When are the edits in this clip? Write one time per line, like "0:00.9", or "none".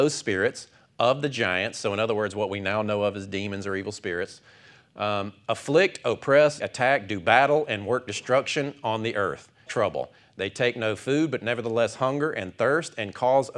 0:06.6
0:09.7